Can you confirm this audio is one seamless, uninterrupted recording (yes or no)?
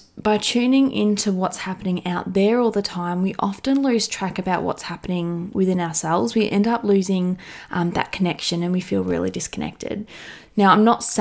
yes